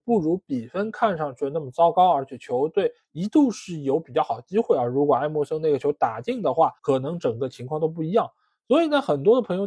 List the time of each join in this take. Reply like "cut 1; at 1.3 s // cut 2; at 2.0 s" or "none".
cut 1; at 6.8 s